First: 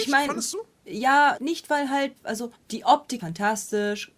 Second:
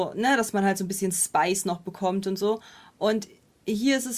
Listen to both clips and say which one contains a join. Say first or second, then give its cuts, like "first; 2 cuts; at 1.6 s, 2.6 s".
first; 4 cuts; at 1.4 s, 2.2 s, 2.5 s, 3.2 s